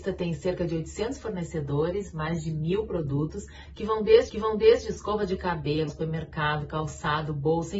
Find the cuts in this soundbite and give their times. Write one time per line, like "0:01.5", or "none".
0:04.3
0:05.9

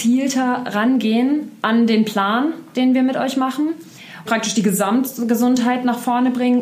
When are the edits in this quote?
0:01.6
0:04.3

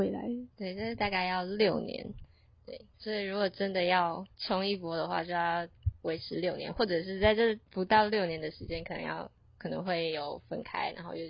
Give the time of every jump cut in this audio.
0:02.9
0:04.3
0:07.6

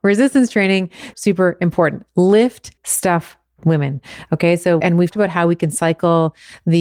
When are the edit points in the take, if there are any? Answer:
0:01.1
0:02.8
0:04.8
0:05.1

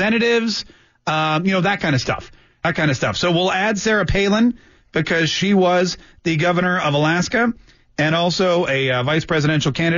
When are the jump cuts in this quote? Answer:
none

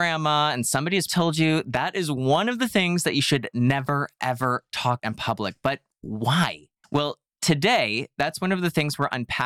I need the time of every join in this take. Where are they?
0:01.1
0:05.0
0:06.8

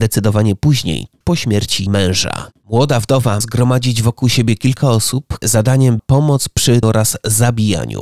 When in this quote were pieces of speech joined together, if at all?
0:01.2
0:01.9
0:03.4
0:05.4
0:06.0
0:06.8

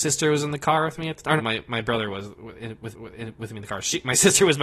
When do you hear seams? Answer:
0:01.4
0:02.9

